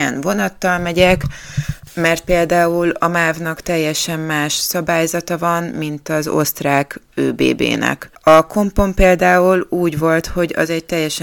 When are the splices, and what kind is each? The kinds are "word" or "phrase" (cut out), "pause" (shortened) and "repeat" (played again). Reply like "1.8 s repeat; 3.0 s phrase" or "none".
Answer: none